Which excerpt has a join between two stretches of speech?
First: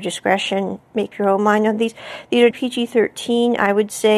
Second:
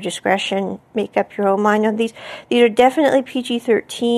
first; 2 cuts; at 1.1 s, 2.5 s

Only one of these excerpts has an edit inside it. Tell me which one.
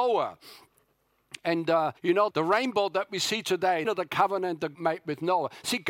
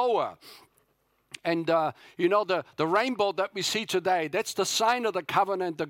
first; 4 cuts; at 2.0 s, 2.3 s, 3.8 s, 4.7 s

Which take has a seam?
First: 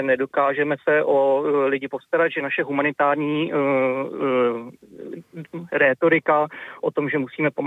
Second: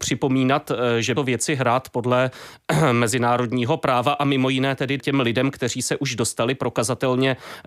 second; 2 cuts; at 1.2 s, 5.0 s

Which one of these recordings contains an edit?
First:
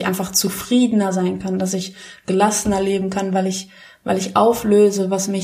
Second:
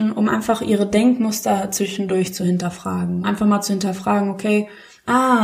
second; 1 cut; at 3.2 s

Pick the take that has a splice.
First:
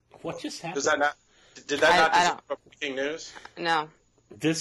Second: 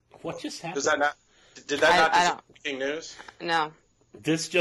second; 1 cut; at 2.5 s

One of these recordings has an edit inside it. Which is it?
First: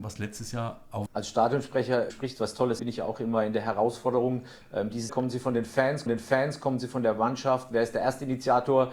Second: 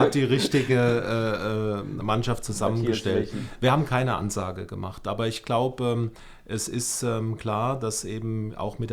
first; 5 cuts; at 1.1 s, 2.1 s, 2.8 s, 5.1 s, 6.1 s

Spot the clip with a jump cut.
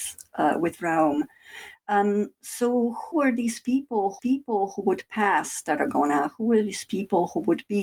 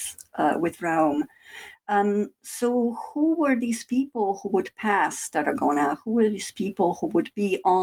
first; 2 cuts; at 3.1 s, 4.2 s

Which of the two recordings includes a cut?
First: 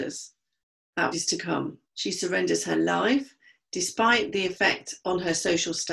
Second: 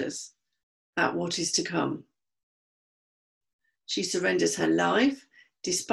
first; 2 cuts; at 1.1 s, 1.8 s

